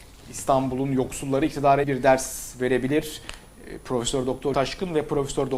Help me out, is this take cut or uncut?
cut